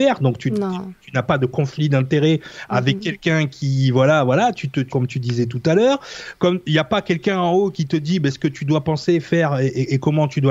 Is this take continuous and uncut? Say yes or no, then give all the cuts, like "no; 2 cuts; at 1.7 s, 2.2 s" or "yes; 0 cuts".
no; 1 cut; at 4.9 s